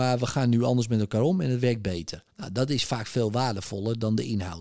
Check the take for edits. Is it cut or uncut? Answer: cut